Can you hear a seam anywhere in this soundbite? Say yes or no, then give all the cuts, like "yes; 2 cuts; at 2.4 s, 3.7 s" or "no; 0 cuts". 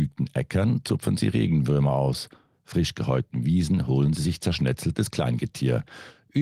no; 0 cuts